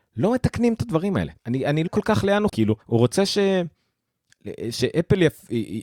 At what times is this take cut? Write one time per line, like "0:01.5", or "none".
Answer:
0:01.4
0:01.9
0:02.5
0:02.8

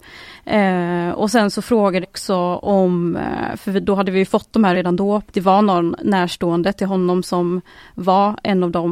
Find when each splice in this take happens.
0:02.0
0:04.7
0:05.3

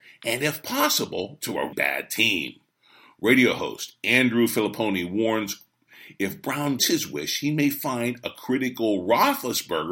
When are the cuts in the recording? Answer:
0:01.7
0:06.8

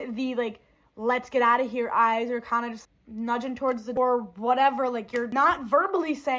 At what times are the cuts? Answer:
0:02.8
0:04.0

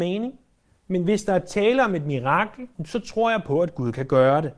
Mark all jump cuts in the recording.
0:02.7

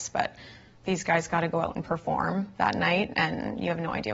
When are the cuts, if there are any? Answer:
none

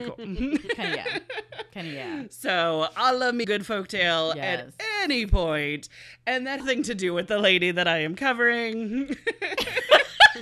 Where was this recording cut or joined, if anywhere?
0:03.4
0:06.6

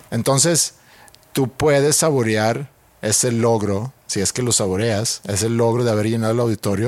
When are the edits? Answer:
none

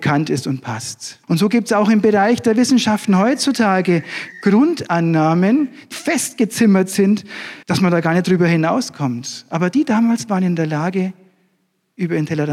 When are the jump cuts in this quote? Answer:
0:01.2
0:04.3
0:05.9
0:07.6

